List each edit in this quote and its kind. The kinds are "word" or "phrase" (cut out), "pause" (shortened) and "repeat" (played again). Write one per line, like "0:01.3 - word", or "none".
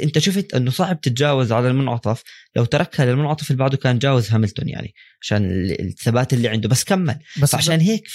none